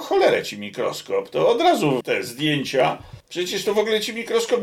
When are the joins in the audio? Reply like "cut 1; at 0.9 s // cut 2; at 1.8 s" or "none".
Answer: cut 1; at 2.0 s // cut 2; at 3.2 s